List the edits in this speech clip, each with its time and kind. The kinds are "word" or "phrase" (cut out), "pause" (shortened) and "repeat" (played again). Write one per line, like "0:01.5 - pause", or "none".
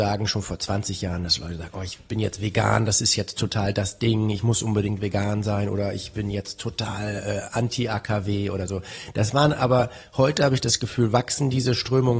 none

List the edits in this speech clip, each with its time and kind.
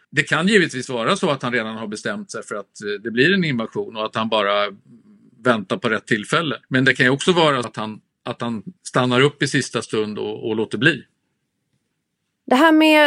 0:06.6 - pause
0:07.6 - word
0:08.8 - pause

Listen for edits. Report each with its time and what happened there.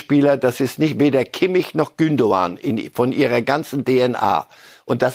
none

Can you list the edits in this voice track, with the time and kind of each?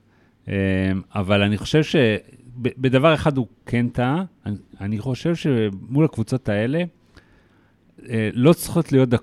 none

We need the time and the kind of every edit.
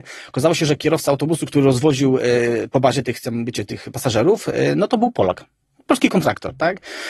none

